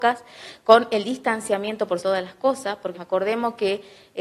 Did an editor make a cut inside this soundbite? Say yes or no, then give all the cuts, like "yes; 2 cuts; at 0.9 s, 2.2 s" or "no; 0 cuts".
yes; 2 cuts; at 2.0 s, 2.9 s